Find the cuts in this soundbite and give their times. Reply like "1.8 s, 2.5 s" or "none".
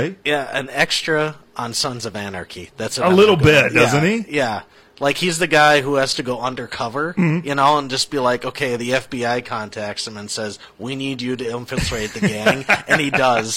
none